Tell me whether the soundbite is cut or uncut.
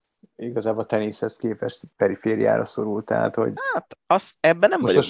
cut